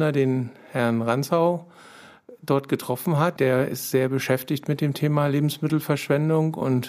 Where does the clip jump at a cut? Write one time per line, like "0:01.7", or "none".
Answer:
0:03.4